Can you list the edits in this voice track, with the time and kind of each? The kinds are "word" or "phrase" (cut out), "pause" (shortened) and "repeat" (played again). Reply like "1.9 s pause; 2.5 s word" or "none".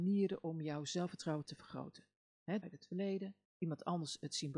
1.5 s phrase; 2.6 s phrase; 3.5 s pause